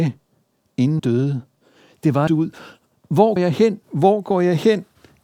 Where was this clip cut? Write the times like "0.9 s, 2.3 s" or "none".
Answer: 1.0 s, 2.3 s, 3.4 s, 3.8 s